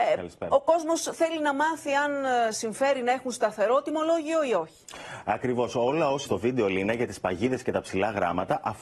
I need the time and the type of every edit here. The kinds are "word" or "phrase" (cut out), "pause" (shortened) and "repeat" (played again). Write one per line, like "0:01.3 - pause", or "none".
0:06.3 - word